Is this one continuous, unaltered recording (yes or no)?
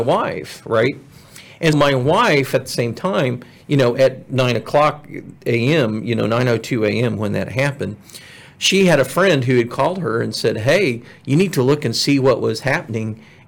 no